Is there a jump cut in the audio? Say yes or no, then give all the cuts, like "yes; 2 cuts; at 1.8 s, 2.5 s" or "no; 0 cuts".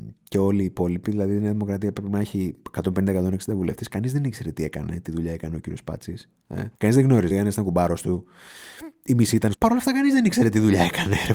yes; 3 cuts; at 6.8 s, 7.3 s, 9.5 s